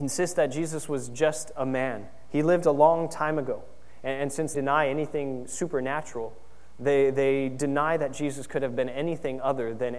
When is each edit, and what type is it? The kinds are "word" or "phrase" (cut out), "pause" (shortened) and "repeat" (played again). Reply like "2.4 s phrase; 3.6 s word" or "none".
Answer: 4.5 s word